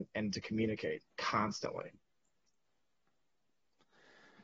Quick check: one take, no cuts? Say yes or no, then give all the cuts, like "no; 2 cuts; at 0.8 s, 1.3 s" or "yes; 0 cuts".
no; 1 cut; at 1.1 s